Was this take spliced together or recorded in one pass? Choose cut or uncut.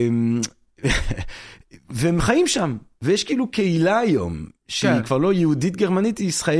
uncut